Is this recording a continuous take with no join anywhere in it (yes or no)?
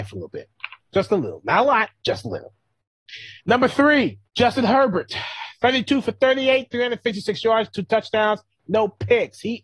no